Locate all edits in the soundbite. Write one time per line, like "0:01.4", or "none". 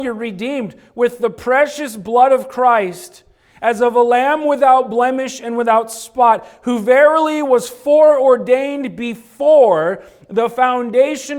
none